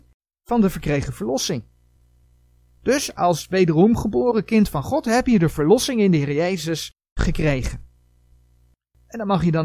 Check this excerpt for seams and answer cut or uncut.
uncut